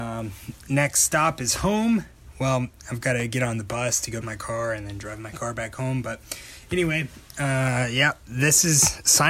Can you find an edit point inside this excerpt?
yes; 1 cut; at 4.2 s

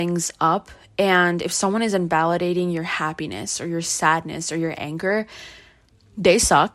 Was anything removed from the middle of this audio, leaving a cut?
no; 0 cuts

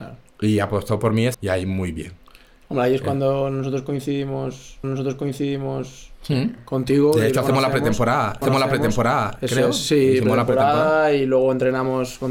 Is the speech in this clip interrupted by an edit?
yes; 3 cuts; at 1.3 s, 4.8 s, 8.4 s

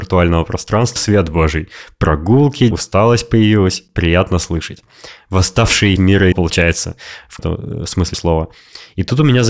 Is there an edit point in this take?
yes; 6 cuts; at 1.0 s, 2.7 s, 6.0 s, 6.3 s, 7.4 s, 8.1 s

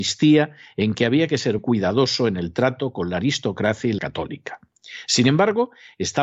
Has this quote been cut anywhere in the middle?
yes; 2 cuts; at 1.6 s, 4.0 s

